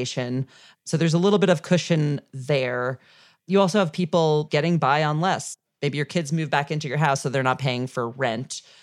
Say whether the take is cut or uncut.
uncut